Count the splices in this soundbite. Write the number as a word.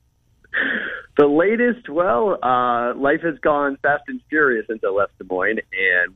zero